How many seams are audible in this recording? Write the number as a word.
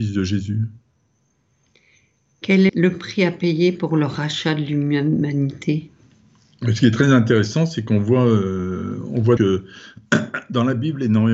two